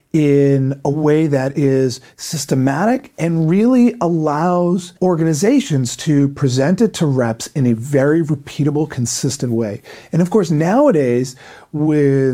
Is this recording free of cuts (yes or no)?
no